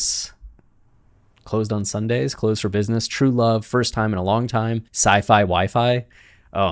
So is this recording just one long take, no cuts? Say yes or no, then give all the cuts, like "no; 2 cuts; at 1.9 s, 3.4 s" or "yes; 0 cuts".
no; 1 cut; at 4.9 s